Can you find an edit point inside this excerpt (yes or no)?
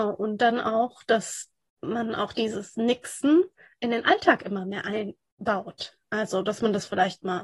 no